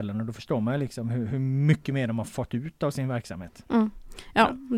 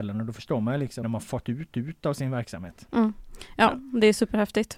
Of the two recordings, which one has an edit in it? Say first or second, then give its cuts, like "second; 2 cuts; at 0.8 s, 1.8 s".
second; 2 cuts; at 1.0 s, 1.7 s